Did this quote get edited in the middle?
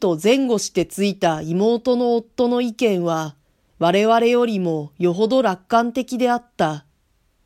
no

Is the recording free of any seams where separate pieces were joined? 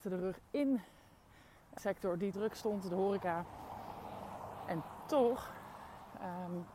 no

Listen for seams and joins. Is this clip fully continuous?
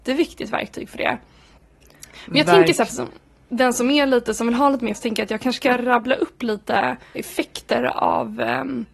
no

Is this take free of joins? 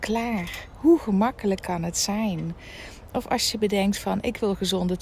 yes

